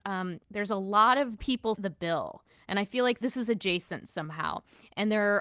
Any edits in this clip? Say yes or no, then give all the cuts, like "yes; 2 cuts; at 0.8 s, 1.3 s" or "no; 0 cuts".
yes; 2 cuts; at 1.4 s, 1.8 s